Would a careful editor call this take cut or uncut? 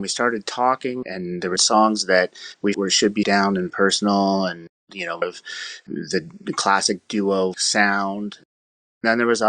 cut